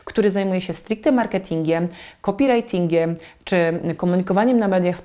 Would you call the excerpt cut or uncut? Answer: uncut